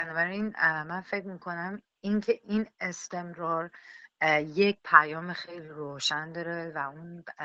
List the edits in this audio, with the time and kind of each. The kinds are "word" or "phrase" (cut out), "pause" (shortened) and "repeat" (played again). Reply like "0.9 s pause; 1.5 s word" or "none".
none